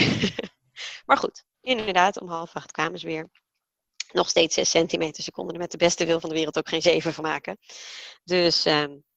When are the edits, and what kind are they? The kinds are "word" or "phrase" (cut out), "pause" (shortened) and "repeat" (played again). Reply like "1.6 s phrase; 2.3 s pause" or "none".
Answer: 1.5 s pause